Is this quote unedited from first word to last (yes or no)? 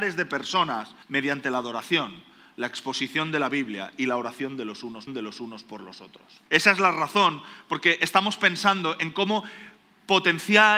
no